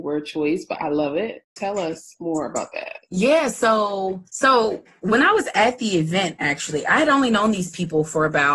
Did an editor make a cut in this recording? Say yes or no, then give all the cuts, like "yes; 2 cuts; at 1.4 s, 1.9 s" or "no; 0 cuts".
yes; 1 cut; at 4.3 s